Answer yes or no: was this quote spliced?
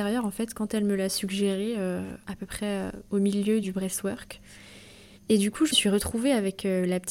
yes